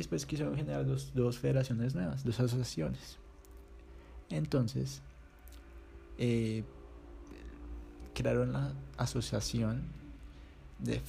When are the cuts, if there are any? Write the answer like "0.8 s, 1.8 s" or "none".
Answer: none